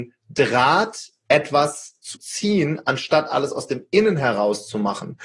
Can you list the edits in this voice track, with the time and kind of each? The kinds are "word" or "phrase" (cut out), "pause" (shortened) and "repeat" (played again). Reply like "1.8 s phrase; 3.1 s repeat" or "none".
2.1 s phrase